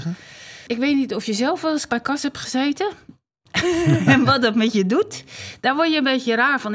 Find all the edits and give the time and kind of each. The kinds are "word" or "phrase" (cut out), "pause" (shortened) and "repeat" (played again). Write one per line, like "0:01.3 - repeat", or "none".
0:01.9 - word